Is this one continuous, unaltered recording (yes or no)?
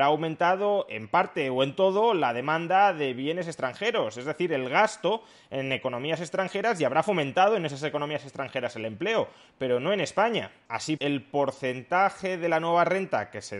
no